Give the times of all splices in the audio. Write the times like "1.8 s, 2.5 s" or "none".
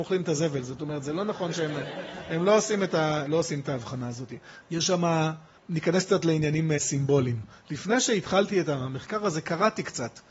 none